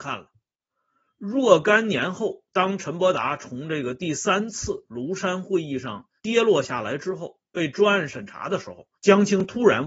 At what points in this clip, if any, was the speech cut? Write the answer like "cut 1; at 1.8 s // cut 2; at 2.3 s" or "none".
cut 1; at 2.5 s // cut 2; at 6.2 s // cut 3; at 8.9 s